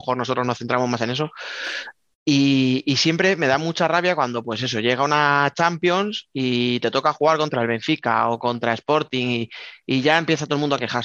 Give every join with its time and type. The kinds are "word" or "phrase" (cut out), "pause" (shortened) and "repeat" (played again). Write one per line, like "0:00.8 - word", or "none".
none